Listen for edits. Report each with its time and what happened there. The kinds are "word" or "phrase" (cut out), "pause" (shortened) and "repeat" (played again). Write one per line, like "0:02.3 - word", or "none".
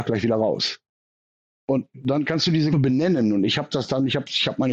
0:02.7 - word